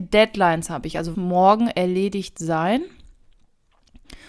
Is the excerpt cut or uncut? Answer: cut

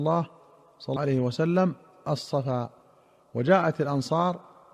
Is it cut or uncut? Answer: cut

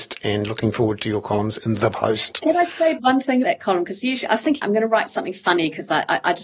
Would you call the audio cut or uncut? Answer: cut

